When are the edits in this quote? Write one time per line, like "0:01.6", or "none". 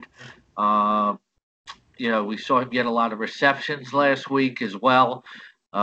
none